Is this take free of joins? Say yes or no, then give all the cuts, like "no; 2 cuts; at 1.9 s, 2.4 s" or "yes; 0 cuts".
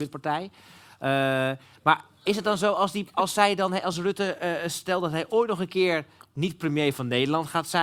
yes; 0 cuts